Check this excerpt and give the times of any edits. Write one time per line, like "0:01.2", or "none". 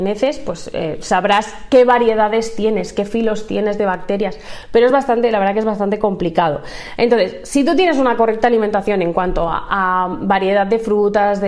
none